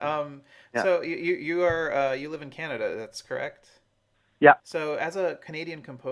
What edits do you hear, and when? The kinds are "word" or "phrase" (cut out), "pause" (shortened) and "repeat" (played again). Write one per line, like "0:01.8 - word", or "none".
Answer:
0:04.6 - pause